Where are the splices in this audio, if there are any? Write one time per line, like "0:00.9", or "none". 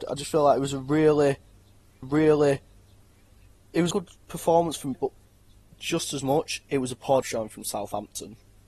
0:02.0
0:03.9
0:04.9
0:07.2